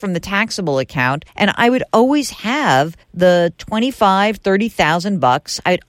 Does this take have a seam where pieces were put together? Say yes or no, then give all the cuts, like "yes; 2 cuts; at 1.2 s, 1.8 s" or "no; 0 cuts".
yes; 2 cuts; at 1.3 s, 3.0 s